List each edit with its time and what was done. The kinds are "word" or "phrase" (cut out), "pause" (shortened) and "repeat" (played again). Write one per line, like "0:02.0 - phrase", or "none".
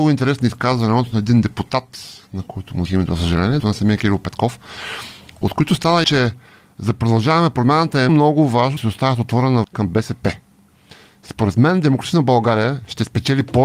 0:02.9 - word
0:03.6 - word
0:06.0 - word
0:08.1 - word
0:08.8 - word
0:09.6 - word